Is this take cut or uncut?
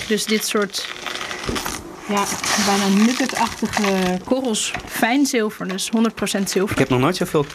uncut